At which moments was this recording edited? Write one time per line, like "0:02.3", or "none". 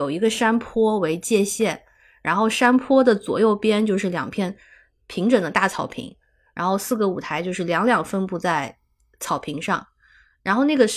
none